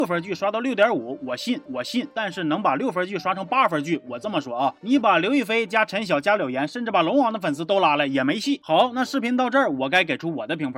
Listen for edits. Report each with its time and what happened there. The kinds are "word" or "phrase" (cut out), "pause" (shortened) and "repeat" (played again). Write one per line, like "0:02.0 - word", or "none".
0:01.7 - repeat